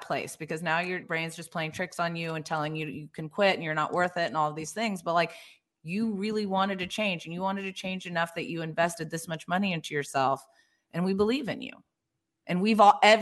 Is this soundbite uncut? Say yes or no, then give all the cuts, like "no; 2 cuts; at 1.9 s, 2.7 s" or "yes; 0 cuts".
no; 1 cut; at 1.0 s